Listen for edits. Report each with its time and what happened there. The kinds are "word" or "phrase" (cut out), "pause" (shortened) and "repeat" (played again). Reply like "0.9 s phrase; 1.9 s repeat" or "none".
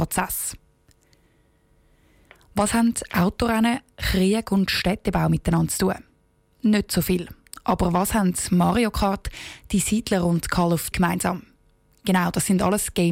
10.9 s word